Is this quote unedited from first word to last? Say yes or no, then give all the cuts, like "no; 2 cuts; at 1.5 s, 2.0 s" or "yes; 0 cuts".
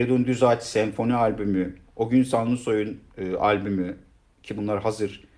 yes; 0 cuts